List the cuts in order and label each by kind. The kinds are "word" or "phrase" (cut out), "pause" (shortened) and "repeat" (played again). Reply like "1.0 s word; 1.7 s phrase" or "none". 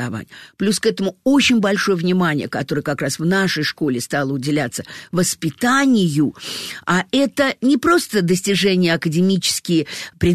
none